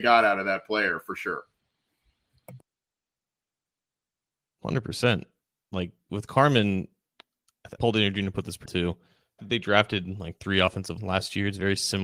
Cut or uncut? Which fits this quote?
cut